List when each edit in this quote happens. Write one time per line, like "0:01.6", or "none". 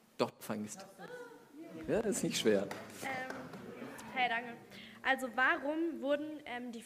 none